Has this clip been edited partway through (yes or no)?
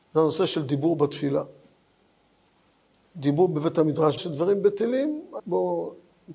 yes